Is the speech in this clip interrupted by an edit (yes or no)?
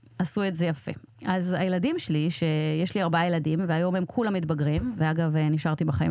no